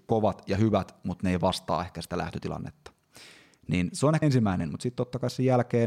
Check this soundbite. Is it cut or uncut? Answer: cut